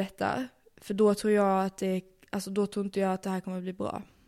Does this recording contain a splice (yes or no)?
no